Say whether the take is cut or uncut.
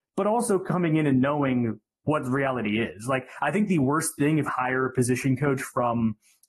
cut